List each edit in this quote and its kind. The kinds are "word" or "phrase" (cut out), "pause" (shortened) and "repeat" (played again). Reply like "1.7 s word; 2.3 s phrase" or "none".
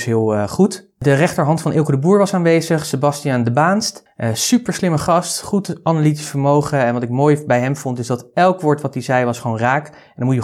none